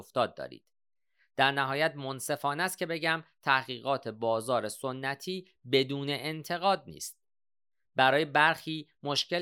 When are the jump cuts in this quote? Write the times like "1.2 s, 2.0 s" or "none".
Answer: none